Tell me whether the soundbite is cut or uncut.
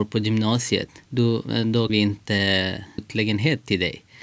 cut